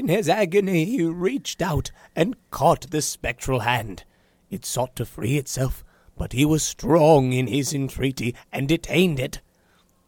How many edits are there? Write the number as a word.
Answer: zero